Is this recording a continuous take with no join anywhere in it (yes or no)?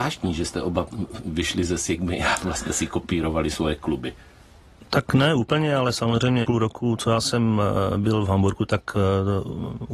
no